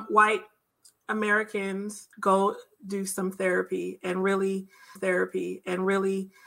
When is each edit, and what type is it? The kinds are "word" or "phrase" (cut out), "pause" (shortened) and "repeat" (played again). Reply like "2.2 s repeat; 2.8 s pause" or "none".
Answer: 2.1 s pause; 5.0 s repeat